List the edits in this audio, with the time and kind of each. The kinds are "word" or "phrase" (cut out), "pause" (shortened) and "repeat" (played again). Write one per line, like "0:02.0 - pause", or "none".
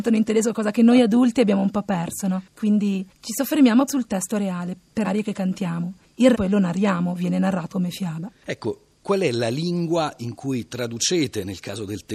0:03.9 - word
0:05.0 - word
0:06.3 - word
0:07.7 - word